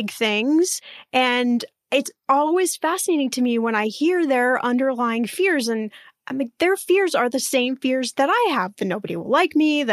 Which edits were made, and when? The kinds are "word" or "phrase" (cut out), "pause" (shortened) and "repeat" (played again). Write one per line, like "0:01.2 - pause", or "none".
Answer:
none